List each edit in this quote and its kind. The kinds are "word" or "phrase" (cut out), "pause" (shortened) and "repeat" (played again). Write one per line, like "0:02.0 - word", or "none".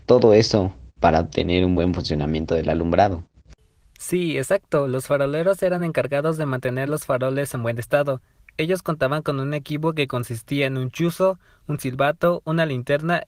none

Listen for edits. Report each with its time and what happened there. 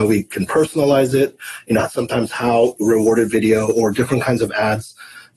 0:02.8 - word

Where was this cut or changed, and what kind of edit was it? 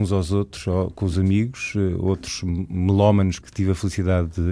0:03.4 - word

